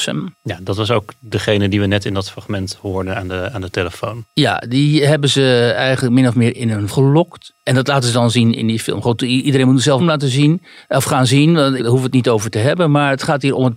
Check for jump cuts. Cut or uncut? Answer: cut